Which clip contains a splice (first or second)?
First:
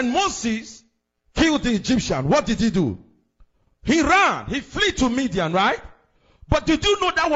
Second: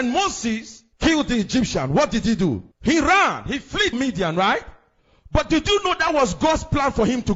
second